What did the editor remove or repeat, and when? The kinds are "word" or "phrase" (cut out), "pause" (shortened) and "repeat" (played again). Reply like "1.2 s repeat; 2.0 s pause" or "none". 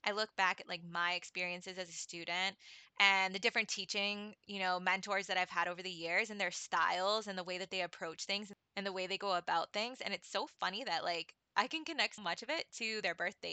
12.2 s word

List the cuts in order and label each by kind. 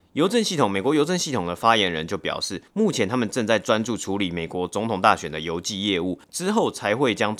2.7 s pause; 6.2 s pause

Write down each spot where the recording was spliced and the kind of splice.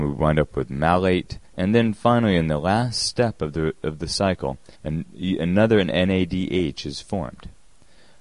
1.5 s pause; 4.7 s pause

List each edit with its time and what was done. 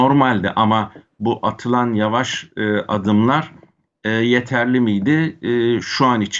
none

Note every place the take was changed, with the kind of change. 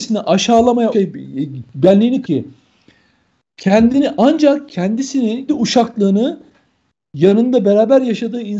0.9 s phrase; 2.2 s word; 5.5 s word

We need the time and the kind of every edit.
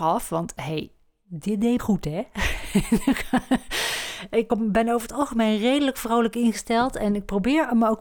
1.8 s phrase; 4.5 s word

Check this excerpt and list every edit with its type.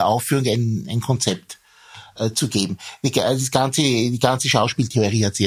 none

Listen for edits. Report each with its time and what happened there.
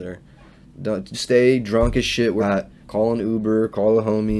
1.1 s word; 2.4 s word; 2.8 s pause

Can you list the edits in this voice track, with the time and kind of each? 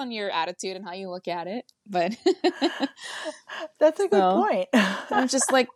none

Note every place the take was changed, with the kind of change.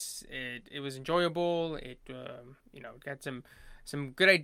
2.6 s pause

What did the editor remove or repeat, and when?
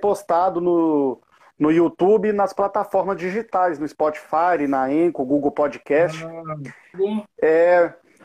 6.9 s word

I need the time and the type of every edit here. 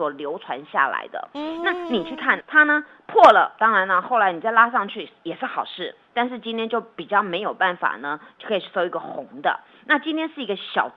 2.4 s phrase

